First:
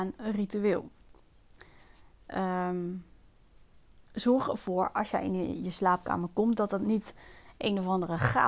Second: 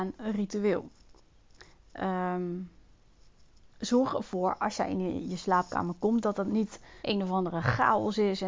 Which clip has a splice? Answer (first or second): second